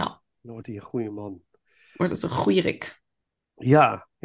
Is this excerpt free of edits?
yes; 0 cuts

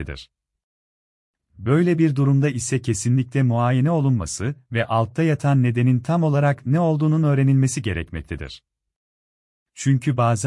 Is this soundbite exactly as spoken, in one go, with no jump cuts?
yes; 0 cuts

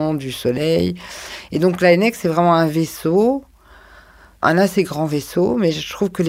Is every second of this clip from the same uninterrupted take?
yes; 0 cuts

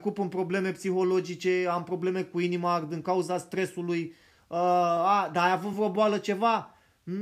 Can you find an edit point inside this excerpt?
no; 0 cuts

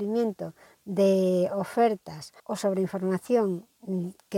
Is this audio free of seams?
no; 1 cut; at 2.4 s

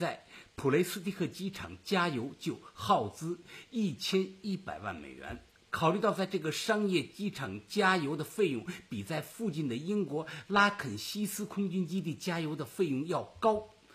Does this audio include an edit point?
no; 0 cuts

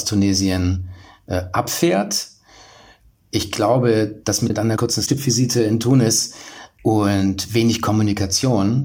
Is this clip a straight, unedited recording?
yes; 0 cuts

